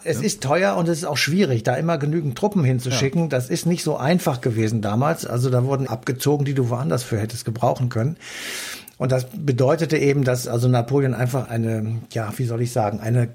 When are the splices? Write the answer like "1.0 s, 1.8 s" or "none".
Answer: 5.9 s, 11.4 s